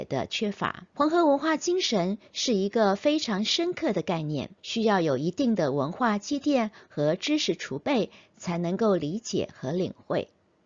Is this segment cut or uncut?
cut